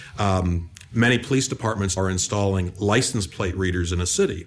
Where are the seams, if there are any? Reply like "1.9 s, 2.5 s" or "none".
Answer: 2.0 s